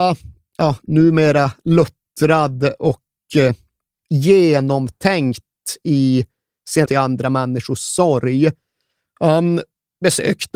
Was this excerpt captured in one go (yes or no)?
no